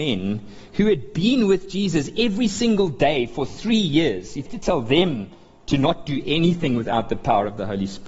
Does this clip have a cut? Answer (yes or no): yes